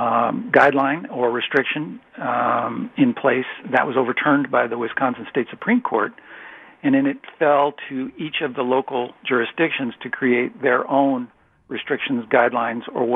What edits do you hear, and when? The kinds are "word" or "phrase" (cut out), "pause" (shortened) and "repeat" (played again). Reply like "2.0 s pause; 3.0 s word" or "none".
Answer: none